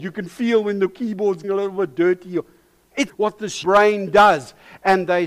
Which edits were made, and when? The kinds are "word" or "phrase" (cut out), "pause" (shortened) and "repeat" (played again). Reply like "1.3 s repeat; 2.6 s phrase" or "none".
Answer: 1.4 s word; 3.1 s word; 3.6 s word